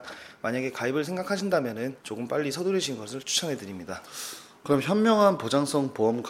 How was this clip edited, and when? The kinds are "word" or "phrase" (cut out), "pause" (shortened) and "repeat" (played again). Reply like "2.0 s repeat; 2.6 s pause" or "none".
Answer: 2.0 s pause